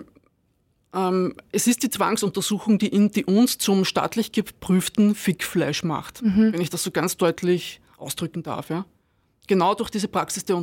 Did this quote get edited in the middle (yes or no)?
no